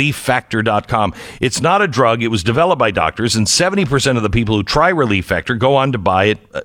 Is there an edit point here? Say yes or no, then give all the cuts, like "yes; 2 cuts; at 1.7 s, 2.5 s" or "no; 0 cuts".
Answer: no; 0 cuts